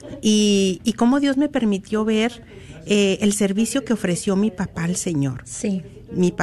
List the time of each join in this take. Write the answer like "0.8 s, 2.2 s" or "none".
none